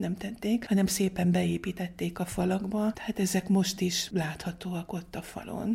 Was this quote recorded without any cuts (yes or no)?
yes